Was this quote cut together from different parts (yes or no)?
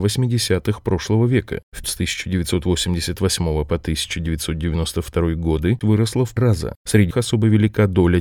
yes